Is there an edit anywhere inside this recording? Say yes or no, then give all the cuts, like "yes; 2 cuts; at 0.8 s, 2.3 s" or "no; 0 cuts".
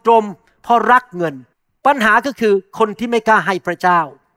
yes; 1 cut; at 1.5 s